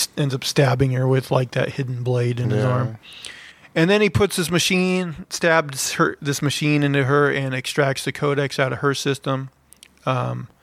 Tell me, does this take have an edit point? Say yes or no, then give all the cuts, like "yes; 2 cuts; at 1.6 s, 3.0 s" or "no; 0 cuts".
no; 0 cuts